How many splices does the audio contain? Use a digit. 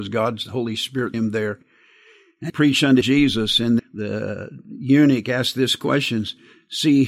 4